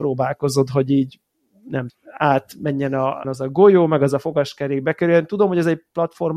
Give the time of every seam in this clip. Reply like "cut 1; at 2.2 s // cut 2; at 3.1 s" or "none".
cut 1; at 1.9 s // cut 2; at 3.2 s